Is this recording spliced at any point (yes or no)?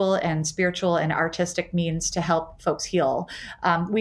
no